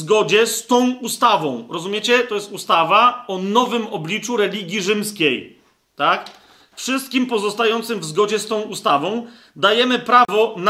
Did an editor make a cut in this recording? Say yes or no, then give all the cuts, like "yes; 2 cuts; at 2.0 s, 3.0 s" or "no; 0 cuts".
no; 0 cuts